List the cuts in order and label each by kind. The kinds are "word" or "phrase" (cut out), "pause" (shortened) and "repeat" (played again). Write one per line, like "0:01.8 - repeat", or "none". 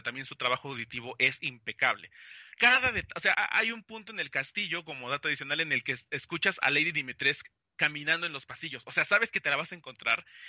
0:02.5 - pause
0:03.3 - word